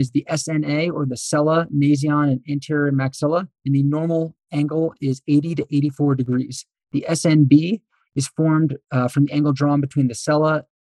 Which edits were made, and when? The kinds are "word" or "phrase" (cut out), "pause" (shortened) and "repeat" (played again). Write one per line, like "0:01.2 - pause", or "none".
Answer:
none